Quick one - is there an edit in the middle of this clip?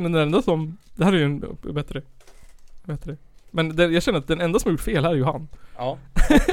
no; 0 cuts

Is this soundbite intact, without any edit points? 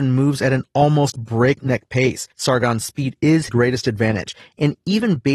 no; 2 cuts; at 2.3 s, 3.5 s

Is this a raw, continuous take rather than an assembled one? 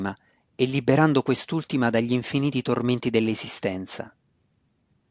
yes; 0 cuts

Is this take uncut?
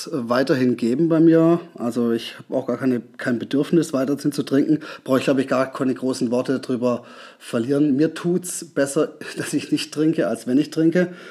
yes; 0 cuts

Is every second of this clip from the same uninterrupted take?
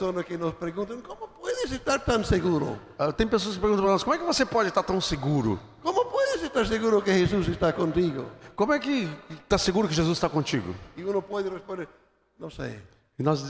yes; 0 cuts

